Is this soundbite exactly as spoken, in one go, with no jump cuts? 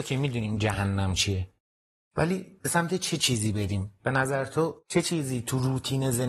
yes; 0 cuts

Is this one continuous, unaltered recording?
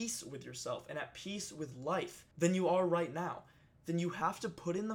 no; 1 cut; at 2.3 s

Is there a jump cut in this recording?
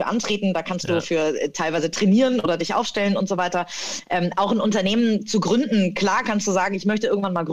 no; 0 cuts

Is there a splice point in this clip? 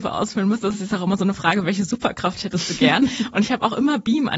no; 0 cuts

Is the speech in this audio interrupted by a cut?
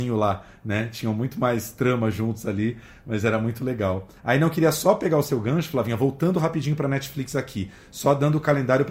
yes; 1 cut; at 4.2 s

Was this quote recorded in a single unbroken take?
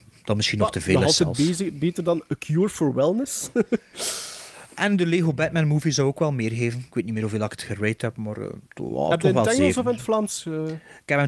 no; 1 cut; at 8.7 s

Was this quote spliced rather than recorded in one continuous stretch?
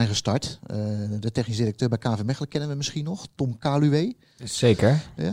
no; 0 cuts

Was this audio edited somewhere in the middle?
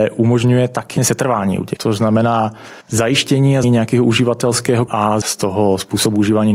yes; 6 cuts; at 1.0 s, 1.8 s, 2.8 s, 3.6 s, 4.9 s, 5.2 s

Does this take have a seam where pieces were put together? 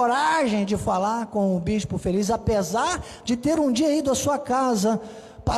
no; 0 cuts

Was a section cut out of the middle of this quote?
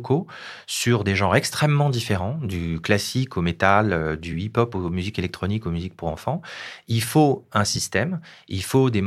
no; 0 cuts

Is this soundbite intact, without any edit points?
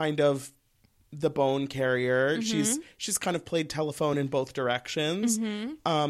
yes; 0 cuts

